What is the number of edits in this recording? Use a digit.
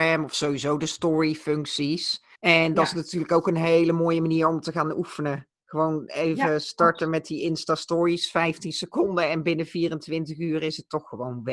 1